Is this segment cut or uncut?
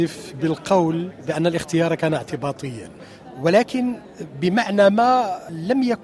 uncut